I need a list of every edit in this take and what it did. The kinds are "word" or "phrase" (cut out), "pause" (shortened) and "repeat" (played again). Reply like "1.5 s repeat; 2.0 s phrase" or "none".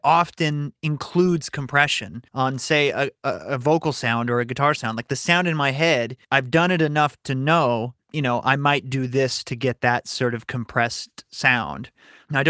2.3 s pause; 6.2 s pause

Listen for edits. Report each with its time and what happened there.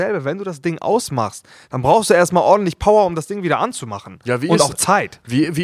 none

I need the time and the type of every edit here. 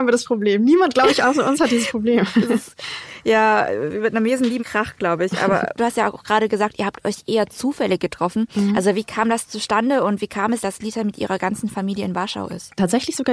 4.6 s word; 5.8 s word; 10.6 s word

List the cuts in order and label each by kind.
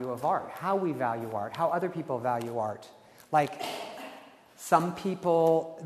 none

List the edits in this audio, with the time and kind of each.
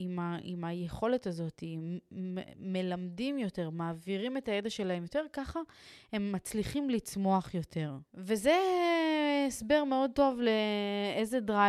8.1 s pause

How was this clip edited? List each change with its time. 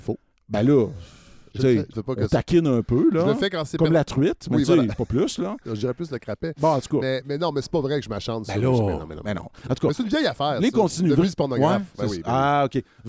1.9 s word; 7.2 s word

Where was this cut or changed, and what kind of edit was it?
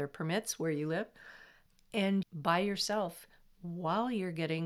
2.2 s phrase

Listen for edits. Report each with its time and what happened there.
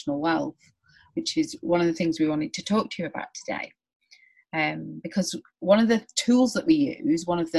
none

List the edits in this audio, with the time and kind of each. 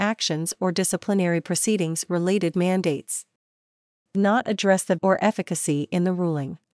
2.5 s phrase; 4.1 s phrase; 5.0 s phrase

